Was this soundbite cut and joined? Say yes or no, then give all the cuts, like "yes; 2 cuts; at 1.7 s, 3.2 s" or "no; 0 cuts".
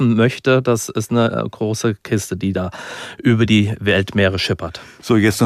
no; 0 cuts